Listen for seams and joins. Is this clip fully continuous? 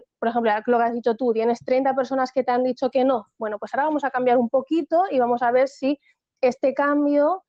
yes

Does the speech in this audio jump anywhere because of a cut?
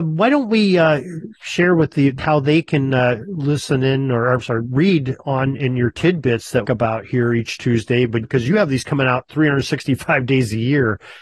yes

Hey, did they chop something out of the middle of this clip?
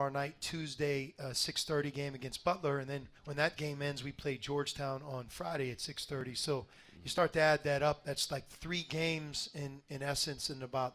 yes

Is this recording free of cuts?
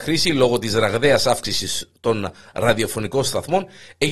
yes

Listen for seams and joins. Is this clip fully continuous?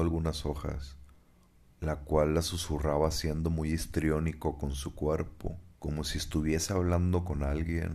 no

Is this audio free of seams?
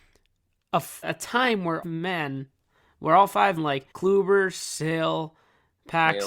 no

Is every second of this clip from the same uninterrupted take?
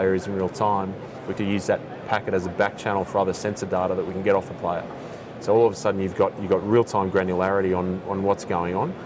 no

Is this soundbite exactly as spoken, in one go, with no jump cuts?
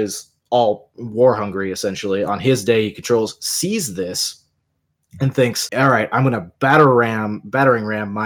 yes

